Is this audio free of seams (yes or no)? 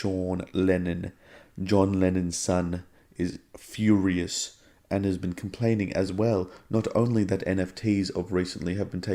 yes